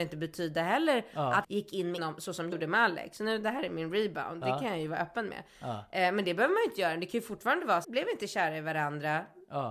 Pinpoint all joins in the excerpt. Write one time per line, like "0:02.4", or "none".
0:01.4
0:02.0
0:02.5
0:07.8